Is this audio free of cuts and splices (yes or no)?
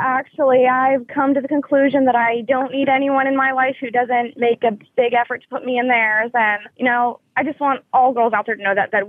no